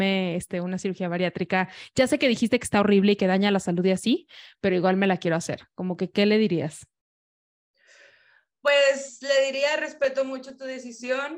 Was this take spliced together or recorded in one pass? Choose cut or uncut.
uncut